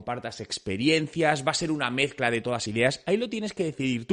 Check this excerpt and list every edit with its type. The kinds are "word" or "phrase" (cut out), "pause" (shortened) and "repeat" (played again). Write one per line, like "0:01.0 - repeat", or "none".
0:02.7 - word